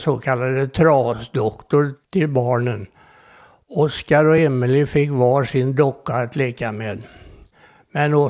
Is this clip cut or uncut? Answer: uncut